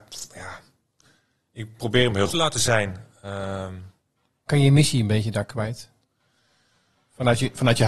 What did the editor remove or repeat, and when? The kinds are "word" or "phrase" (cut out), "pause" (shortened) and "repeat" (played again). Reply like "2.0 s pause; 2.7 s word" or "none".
1.8 s word; 2.3 s word; 4.5 s word